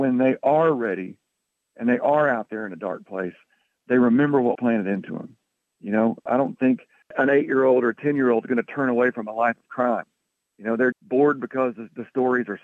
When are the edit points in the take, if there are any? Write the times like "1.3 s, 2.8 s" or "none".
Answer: 4.5 s, 10.9 s